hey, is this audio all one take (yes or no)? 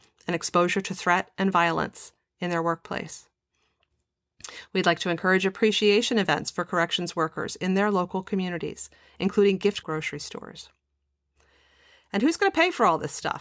no